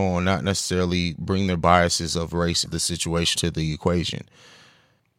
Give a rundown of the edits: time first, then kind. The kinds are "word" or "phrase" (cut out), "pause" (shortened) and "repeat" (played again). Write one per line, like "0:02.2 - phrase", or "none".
0:02.7 - word
0:03.4 - word